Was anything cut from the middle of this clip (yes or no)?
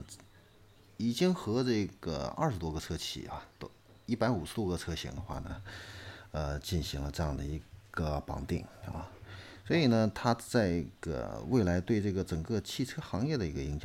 no